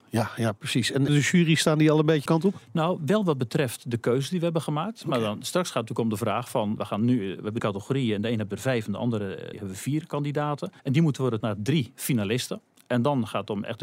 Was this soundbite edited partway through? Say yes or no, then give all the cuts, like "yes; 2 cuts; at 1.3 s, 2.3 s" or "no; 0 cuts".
yes; 8 cuts; at 1.1 s, 2.3 s, 2.6 s, 6.8 s, 7.6 s, 9.5 s, 10.8 s, 11.4 s